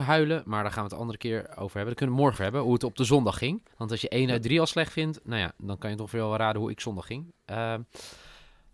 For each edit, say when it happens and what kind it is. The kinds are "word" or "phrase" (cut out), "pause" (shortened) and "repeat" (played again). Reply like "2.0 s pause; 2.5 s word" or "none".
2.3 s word; 3.7 s pause